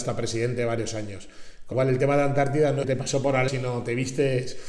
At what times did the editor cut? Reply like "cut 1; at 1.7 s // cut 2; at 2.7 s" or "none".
cut 1; at 1.7 s // cut 2; at 2.8 s // cut 3; at 3.5 s